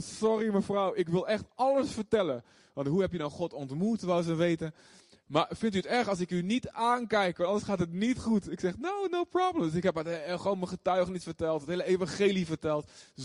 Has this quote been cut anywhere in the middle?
no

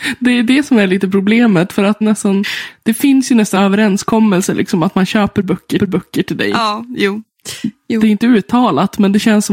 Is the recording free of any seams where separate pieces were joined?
no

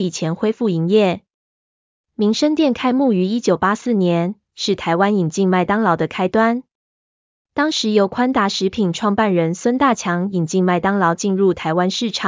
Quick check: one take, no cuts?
yes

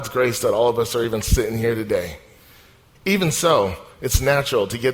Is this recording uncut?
yes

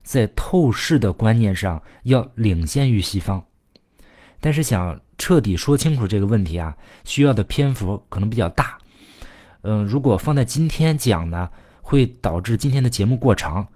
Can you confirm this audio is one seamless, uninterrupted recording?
yes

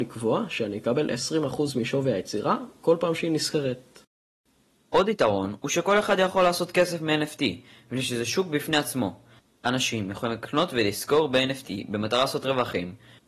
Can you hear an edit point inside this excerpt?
no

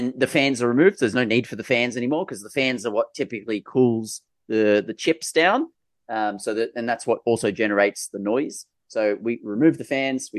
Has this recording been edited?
no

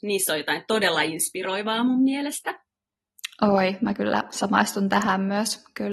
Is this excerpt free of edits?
yes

